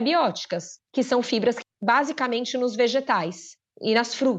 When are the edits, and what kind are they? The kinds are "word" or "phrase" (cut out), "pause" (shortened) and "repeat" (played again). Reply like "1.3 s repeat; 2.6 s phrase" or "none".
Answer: 1.6 s word